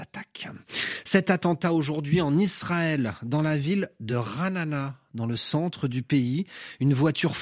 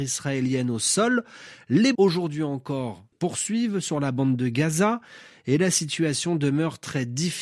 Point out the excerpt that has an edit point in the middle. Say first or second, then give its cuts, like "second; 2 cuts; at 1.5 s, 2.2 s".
second; 2 cuts; at 1.9 s, 3.1 s